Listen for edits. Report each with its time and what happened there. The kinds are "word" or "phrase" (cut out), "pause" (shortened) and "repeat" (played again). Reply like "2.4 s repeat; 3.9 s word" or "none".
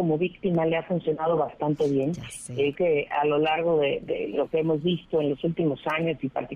2.7 s word